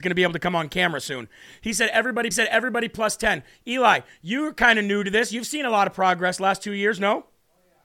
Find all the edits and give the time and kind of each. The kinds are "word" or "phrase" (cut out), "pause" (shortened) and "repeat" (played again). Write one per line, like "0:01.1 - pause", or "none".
0:02.3 - repeat